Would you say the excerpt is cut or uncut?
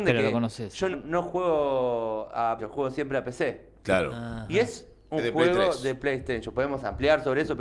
cut